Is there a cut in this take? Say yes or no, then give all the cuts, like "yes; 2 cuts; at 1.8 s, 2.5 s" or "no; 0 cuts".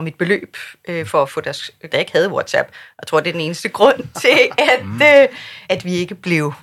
yes; 2 cuts; at 1.9 s, 5.6 s